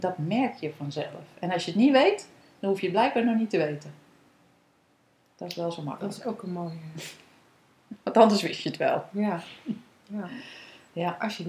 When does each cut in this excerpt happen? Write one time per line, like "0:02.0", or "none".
none